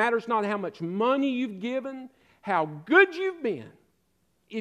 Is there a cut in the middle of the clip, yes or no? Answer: no